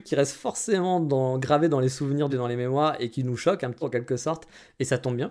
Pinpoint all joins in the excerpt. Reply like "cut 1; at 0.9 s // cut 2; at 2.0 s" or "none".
cut 1; at 2.3 s // cut 2; at 3.8 s